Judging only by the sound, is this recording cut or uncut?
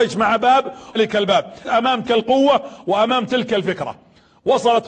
cut